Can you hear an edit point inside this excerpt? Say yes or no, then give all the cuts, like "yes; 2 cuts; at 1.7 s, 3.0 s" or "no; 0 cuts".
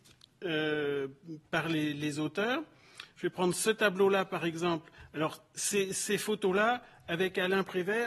no; 0 cuts